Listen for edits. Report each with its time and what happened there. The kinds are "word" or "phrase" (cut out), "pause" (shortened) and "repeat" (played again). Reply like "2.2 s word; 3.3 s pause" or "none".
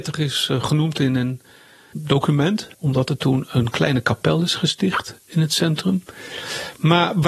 1.9 s word; 2.7 s pause